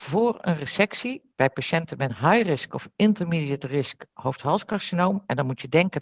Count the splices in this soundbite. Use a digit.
1